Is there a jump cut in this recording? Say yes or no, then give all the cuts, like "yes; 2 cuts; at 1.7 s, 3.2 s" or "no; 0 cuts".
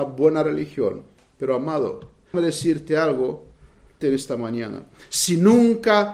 yes; 2 cuts; at 2.3 s, 4.0 s